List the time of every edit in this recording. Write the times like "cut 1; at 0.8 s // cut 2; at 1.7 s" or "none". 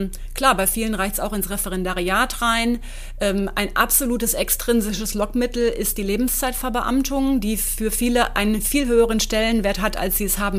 none

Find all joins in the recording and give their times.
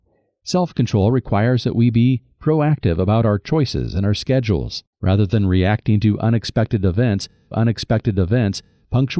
cut 1; at 4.9 s // cut 2; at 7.5 s

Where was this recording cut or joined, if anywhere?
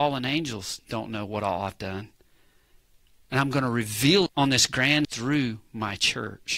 cut 1; at 4.3 s // cut 2; at 5.0 s

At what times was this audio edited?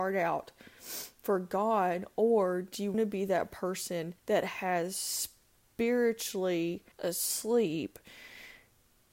cut 1; at 2.9 s // cut 2; at 4.2 s // cut 3; at 6.9 s

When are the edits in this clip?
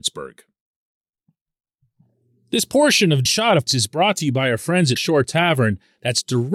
cut 1; at 3.3 s // cut 2; at 3.7 s // cut 3; at 5.0 s

